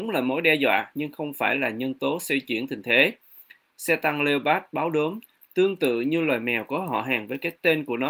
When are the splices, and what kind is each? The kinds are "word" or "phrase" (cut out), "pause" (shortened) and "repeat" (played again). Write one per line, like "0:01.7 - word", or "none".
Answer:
none